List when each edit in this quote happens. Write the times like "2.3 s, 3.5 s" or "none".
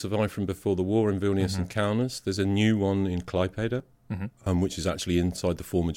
4.3 s

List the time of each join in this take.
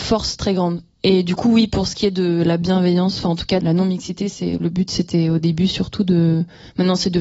3.6 s

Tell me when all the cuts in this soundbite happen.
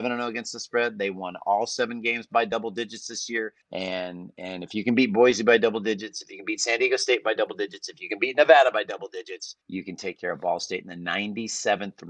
3.6 s, 9.6 s

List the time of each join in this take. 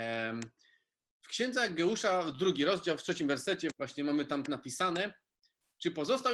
3.7 s, 4.5 s

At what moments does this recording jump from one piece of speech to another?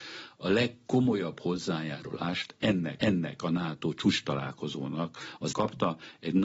3.0 s, 5.5 s

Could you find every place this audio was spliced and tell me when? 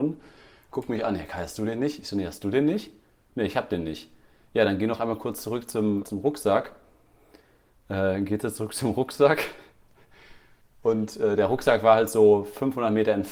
6.0 s

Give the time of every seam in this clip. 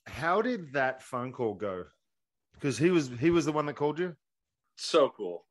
none

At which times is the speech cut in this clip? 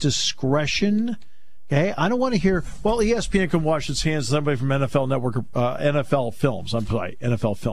none

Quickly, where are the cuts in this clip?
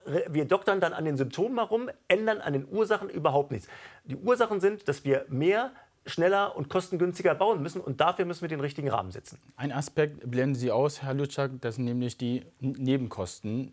none

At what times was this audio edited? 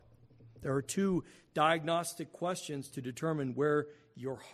none

